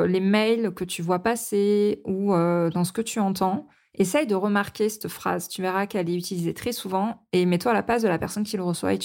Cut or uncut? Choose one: uncut